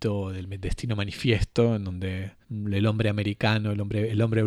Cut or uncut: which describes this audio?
cut